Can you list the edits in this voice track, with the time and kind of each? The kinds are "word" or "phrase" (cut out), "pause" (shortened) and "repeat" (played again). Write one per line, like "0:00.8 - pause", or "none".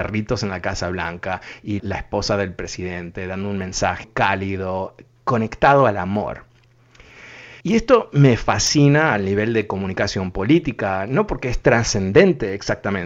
0:01.8 - word
0:04.0 - word
0:07.6 - pause

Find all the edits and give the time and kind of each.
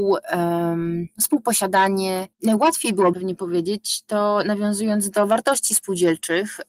0:03.1 - word

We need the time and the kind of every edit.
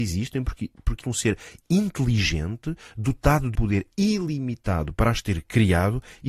0:01.0 - word
0:03.5 - word

